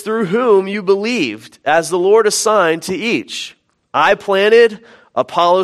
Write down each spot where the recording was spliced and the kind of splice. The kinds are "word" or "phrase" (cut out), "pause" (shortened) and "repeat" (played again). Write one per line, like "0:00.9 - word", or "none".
none